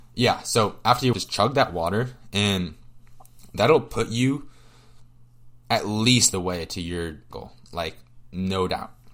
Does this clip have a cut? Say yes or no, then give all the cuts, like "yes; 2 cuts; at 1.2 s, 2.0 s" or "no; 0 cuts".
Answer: yes; 3 cuts; at 1.1 s, 6.3 s, 7.3 s